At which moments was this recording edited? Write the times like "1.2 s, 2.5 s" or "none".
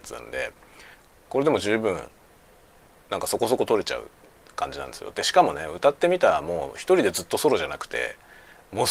none